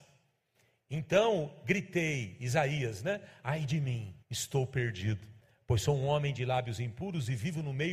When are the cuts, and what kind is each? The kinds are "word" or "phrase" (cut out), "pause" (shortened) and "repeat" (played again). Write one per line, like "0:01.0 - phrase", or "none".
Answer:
0:04.2 - pause
0:05.4 - pause